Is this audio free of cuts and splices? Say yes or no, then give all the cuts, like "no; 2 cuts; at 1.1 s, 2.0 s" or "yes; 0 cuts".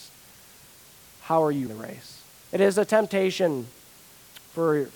no; 1 cut; at 1.7 s